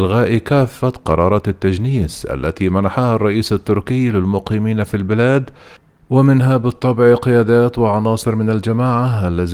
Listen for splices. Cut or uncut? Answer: uncut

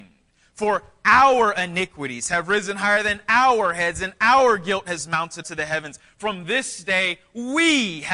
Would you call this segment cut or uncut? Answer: cut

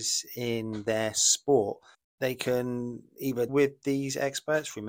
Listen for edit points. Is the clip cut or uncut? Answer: cut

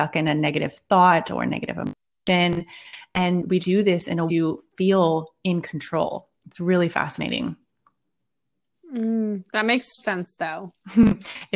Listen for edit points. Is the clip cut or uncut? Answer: cut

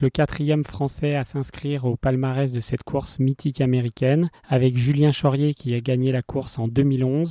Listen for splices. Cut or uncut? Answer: cut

